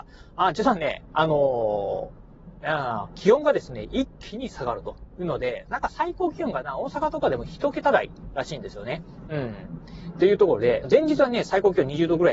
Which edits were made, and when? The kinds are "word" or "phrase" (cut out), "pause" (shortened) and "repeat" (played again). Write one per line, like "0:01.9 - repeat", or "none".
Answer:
0:10.8 - phrase